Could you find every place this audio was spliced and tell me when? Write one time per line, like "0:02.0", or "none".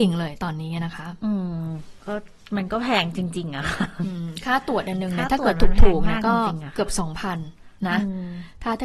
none